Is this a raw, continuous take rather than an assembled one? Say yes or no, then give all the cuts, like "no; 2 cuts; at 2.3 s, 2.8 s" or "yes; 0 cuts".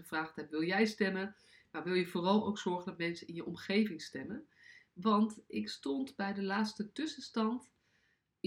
yes; 0 cuts